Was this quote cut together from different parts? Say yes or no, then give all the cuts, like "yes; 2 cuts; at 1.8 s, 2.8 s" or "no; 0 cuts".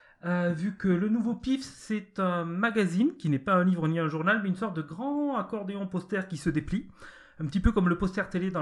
no; 0 cuts